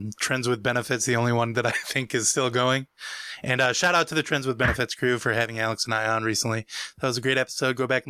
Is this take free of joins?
yes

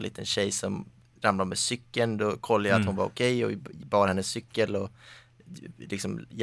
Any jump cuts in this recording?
no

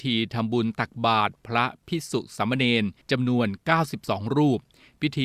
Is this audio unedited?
no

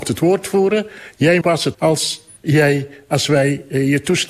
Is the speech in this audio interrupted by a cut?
yes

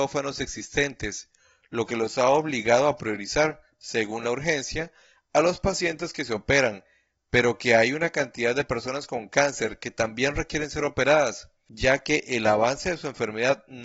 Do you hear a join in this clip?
no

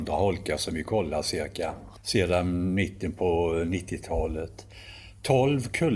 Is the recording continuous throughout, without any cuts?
yes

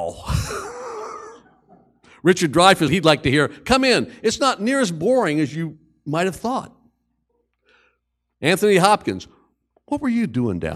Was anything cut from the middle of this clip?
yes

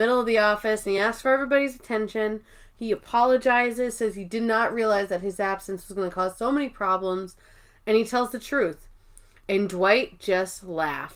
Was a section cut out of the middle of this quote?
no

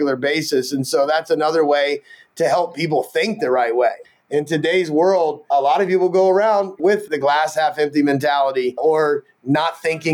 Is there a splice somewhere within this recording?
no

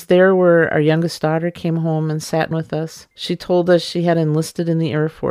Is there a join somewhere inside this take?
yes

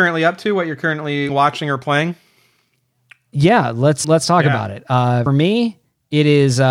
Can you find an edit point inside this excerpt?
yes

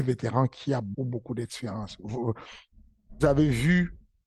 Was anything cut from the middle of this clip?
yes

